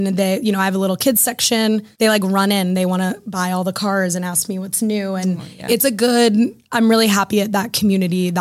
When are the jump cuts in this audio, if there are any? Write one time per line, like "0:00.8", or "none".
0:01.9